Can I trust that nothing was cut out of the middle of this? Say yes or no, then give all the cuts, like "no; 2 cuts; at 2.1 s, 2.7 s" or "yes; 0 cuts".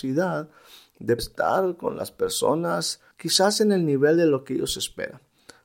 no; 2 cuts; at 1.2 s, 3.1 s